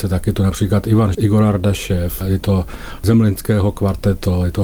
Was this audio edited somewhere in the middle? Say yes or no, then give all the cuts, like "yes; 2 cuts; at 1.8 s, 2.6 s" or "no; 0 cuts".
yes; 1 cut; at 1.1 s